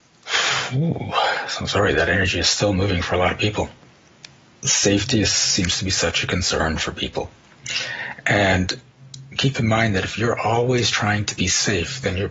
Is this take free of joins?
yes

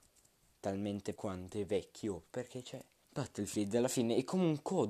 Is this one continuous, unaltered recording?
no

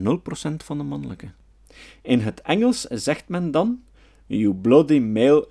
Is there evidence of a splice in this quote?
no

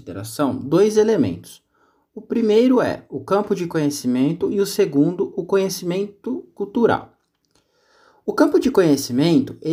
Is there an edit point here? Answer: no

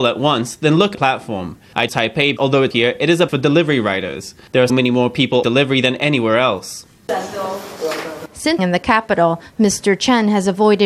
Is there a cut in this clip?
yes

